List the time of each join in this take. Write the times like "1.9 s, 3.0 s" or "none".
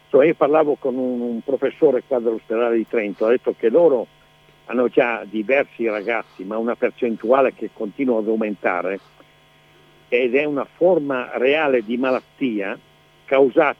none